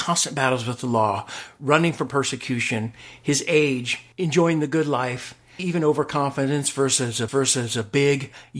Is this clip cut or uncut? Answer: cut